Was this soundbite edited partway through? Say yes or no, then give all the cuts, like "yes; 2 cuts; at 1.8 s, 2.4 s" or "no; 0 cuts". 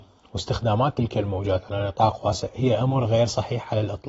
no; 0 cuts